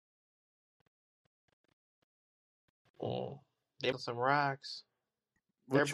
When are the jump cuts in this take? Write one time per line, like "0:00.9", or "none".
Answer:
0:03.9